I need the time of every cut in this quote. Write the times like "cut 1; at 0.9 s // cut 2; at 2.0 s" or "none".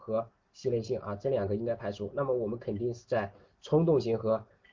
none